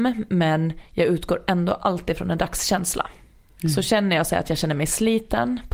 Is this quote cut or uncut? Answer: uncut